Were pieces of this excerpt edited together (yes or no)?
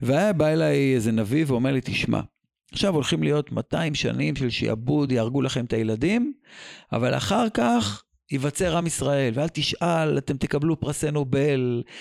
no